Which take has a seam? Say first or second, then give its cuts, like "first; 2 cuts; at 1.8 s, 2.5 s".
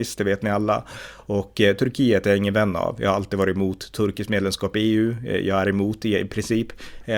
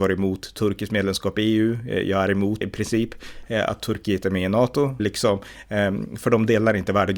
second; 2 cuts; at 2.6 s, 5.0 s